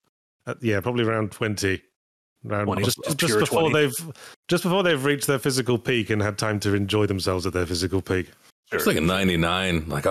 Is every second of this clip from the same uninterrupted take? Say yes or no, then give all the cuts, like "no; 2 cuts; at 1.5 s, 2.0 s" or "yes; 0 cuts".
yes; 0 cuts